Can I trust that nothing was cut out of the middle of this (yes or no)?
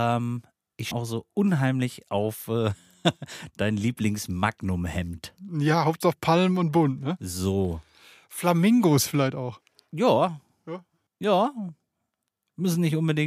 no